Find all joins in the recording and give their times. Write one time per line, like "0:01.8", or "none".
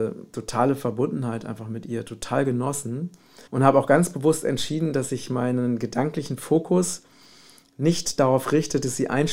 0:03.5